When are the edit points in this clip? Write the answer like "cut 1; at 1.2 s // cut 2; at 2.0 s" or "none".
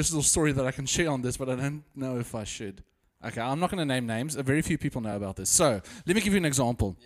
none